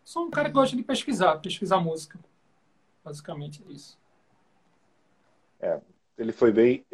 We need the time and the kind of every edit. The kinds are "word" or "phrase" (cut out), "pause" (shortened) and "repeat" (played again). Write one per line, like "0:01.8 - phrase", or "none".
none